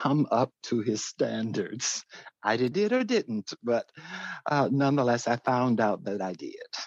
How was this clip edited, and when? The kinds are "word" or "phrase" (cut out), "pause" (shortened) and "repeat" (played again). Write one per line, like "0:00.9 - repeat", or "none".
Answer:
0:02.7 - phrase